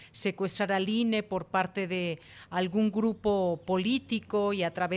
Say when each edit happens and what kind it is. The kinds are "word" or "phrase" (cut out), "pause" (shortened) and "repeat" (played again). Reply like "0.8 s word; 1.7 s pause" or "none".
none